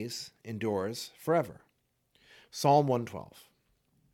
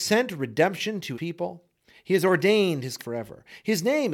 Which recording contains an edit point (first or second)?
second